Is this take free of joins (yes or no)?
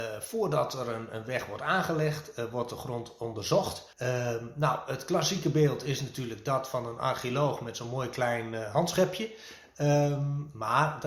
no